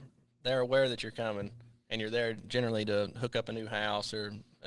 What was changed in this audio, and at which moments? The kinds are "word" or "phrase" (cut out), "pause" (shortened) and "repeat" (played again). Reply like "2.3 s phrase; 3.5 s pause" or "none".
none